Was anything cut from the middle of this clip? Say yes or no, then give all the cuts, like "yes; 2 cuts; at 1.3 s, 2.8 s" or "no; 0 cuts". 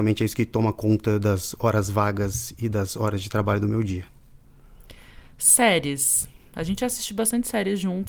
no; 0 cuts